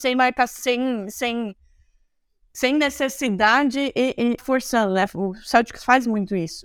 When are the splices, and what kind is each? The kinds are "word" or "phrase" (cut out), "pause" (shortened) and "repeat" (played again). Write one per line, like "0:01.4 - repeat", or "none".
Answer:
0:04.4 - phrase